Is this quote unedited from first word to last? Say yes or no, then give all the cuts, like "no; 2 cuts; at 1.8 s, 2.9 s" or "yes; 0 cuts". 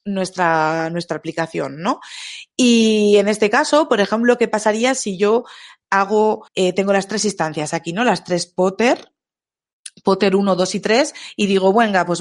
no; 2 cuts; at 2.5 s, 6.5 s